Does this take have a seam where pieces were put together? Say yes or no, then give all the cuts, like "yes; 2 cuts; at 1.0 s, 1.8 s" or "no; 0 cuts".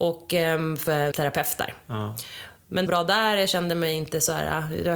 yes; 2 cuts; at 1.1 s, 2.9 s